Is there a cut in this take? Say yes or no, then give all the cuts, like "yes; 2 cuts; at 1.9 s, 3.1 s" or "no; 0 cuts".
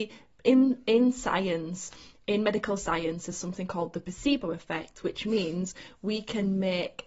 no; 0 cuts